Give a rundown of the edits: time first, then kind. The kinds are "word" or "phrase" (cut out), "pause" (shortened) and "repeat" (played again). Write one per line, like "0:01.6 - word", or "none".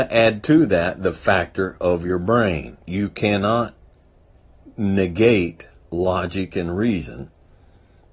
none